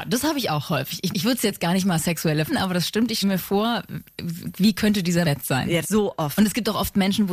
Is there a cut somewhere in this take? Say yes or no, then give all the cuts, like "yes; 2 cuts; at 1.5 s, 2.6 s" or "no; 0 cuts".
yes; 5 cuts; at 1.1 s, 2.5 s, 3.2 s, 5.2 s, 5.8 s